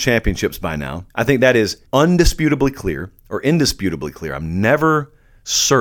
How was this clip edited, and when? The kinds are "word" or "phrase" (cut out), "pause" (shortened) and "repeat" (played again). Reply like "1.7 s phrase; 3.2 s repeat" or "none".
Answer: 1.1 s pause; 1.9 s pause